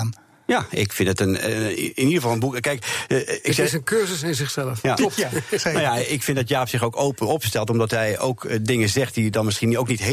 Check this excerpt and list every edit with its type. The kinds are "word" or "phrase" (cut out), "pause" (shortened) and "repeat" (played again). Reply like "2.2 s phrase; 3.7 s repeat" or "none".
none